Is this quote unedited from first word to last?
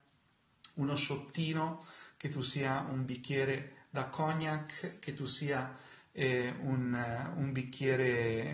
yes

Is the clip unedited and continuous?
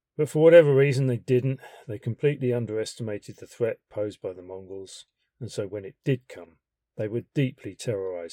yes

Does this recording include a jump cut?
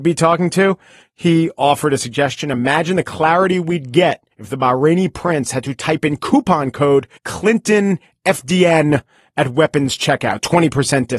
yes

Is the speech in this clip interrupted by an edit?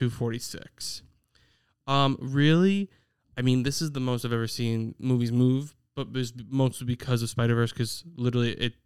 no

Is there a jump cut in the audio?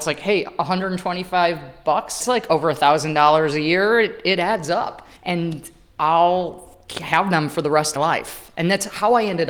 yes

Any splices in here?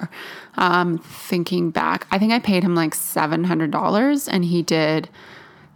no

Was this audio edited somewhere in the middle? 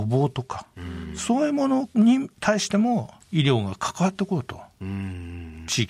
yes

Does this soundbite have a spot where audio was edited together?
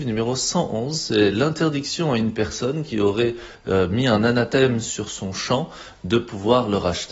no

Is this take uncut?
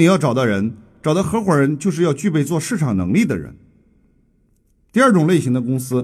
yes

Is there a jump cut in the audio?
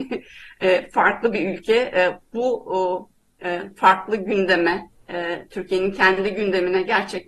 no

